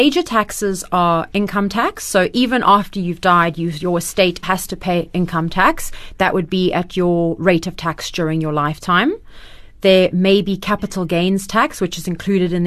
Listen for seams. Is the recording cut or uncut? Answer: cut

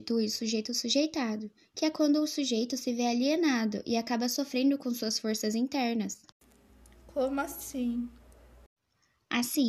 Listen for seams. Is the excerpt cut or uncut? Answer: uncut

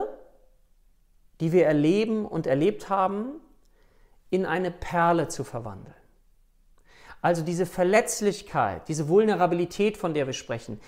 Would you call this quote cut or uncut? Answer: uncut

